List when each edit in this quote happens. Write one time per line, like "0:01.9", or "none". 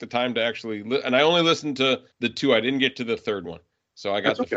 0:02.1